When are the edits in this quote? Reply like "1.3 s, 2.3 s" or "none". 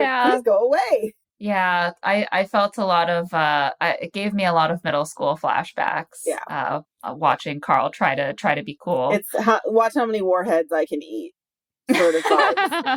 none

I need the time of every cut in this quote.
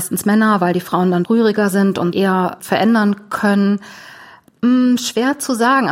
1.2 s, 2.1 s, 2.6 s

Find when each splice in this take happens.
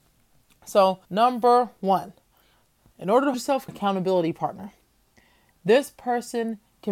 1.1 s, 3.3 s, 3.7 s

